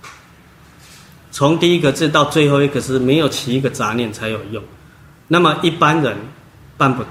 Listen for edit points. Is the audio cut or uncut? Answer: uncut